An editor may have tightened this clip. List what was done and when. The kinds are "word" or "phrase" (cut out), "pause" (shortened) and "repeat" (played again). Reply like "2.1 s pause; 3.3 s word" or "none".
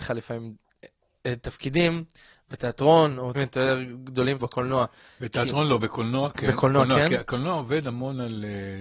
3.3 s word; 4.4 s word